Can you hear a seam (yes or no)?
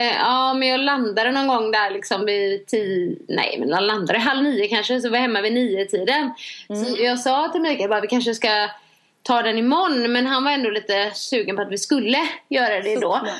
no